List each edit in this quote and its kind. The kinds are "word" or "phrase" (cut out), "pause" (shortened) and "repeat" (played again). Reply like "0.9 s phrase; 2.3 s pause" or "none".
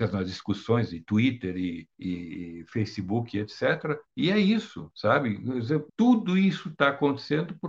1.9 s pause; 4.1 s pause; 5.9 s pause

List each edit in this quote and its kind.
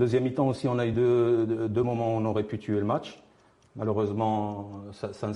none

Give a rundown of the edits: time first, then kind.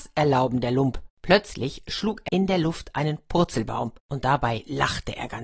1.1 s pause; 2.3 s word; 4.0 s pause

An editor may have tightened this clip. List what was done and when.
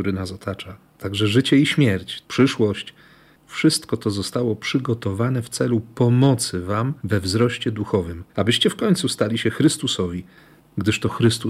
2.2 s word; 7.0 s pause; 8.3 s pause

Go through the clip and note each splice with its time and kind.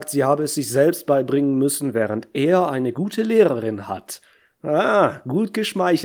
none

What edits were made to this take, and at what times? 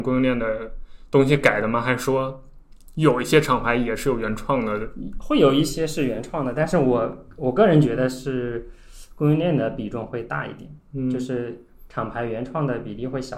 none

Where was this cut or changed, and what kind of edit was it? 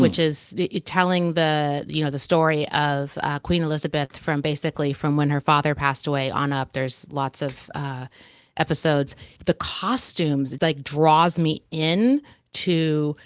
9.4 s word; 10.6 s word

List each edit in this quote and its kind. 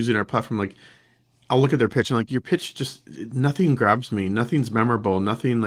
none

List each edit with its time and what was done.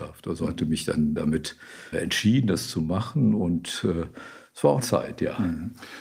1.9 s word; 4.8 s phrase

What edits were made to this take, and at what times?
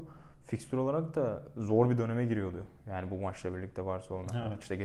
none

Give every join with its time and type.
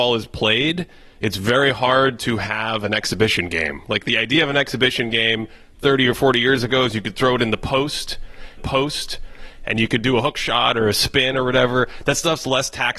8.6 s repeat

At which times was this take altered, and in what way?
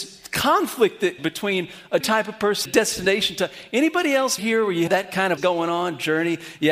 1.2 s word; 2.0 s word; 2.6 s word; 4.4 s word; 4.9 s word; 5.4 s word

